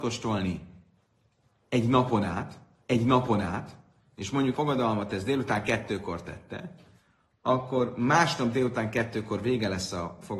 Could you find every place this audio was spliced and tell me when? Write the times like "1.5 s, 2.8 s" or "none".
2.8 s, 4.5 s